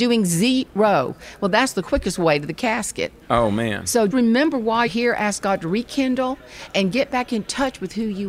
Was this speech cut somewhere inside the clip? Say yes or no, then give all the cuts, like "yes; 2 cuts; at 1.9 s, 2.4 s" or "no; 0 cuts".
yes; 3 cuts; at 3.2 s, 4.1 s, 4.9 s